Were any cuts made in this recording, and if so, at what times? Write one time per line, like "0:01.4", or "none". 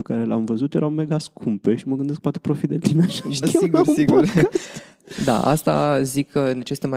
0:03.4

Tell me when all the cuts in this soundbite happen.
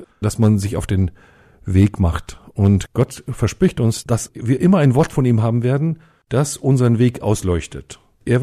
none

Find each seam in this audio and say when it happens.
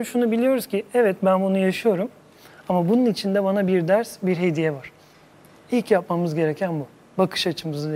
none

